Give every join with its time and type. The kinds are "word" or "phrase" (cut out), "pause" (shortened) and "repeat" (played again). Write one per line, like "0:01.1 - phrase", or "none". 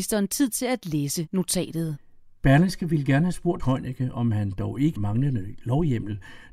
0:03.6 - word
0:05.0 - phrase